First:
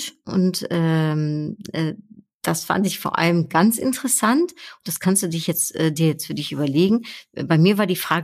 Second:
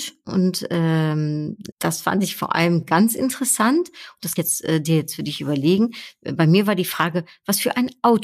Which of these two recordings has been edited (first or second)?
second